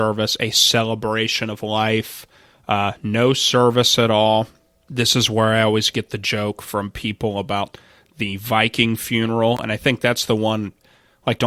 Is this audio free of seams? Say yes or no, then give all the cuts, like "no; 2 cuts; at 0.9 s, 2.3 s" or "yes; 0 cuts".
yes; 0 cuts